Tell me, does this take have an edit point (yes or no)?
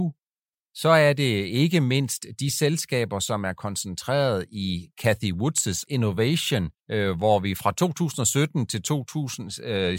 yes